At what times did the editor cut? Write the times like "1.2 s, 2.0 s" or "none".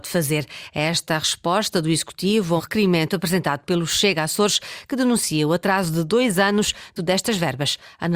2.6 s, 7.0 s